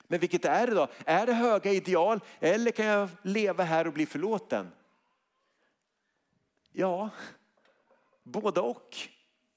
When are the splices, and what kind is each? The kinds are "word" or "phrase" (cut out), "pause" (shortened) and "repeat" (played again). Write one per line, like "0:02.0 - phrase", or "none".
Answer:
none

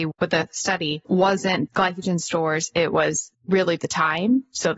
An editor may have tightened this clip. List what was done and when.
0:03.3 - pause

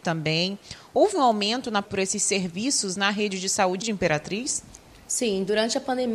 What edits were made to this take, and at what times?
0:01.8 - word
0:03.8 - word

